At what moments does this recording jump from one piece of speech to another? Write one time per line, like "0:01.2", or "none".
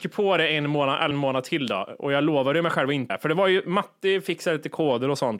0:01.1
0:03.1

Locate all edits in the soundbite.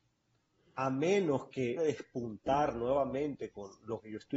0:01.8

